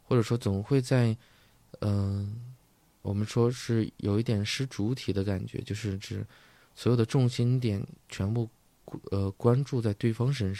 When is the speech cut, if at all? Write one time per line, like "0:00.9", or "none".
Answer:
none